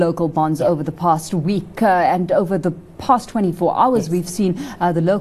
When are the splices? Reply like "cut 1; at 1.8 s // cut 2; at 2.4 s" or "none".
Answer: none